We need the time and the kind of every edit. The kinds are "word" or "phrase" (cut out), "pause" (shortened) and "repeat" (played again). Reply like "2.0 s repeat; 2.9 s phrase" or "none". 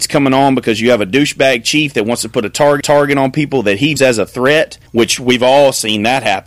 2.8 s repeat; 4.0 s word; 4.9 s pause